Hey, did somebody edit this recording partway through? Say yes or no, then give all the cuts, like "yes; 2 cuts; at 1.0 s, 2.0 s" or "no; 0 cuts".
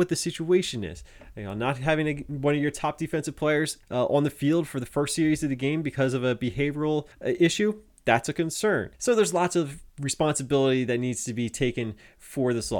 yes; 4 cuts; at 3.8 s, 7.1 s, 8.9 s, 9.9 s